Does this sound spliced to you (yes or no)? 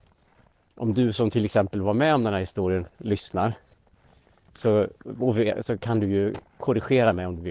no